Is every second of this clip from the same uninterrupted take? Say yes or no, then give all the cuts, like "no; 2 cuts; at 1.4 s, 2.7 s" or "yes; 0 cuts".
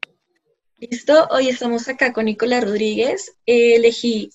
yes; 0 cuts